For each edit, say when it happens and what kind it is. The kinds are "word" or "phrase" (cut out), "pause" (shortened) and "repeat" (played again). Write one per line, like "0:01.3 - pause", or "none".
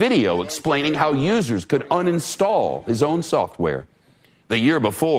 none